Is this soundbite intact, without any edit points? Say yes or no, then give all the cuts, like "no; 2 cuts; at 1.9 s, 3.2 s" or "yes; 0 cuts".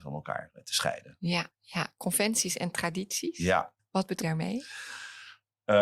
no; 3 cuts; at 1.5 s, 3.8 s, 4.2 s